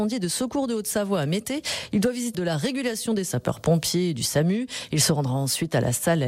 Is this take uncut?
no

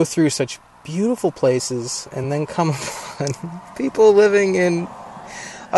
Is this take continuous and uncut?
yes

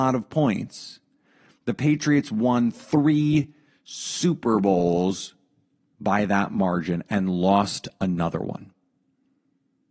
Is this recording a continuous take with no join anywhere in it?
yes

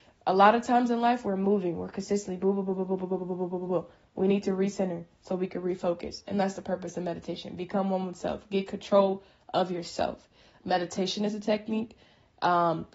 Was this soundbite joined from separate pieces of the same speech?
no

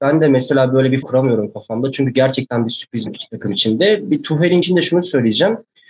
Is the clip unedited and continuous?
no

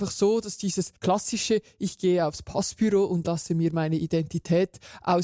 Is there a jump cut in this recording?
yes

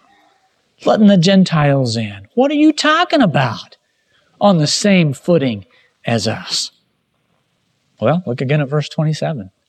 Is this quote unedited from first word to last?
yes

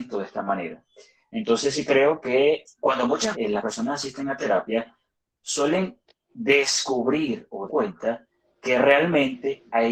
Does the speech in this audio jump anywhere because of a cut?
yes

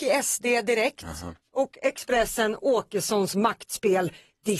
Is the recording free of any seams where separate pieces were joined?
yes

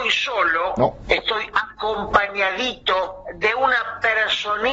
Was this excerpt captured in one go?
yes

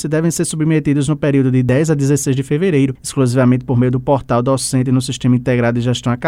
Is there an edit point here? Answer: no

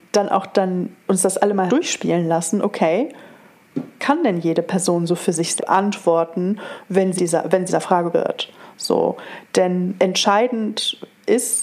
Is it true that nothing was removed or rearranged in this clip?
no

